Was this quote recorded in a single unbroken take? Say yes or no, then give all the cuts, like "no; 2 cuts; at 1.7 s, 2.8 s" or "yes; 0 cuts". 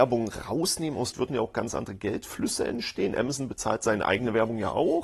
no; 1 cut; at 1.1 s